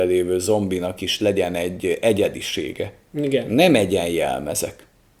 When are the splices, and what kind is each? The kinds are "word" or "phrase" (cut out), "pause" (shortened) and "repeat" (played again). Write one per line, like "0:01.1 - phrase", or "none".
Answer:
none